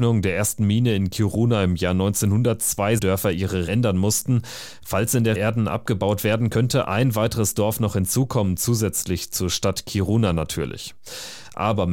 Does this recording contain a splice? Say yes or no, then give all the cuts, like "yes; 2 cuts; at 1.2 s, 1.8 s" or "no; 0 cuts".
yes; 3 cuts; at 3.0 s, 3.7 s, 5.4 s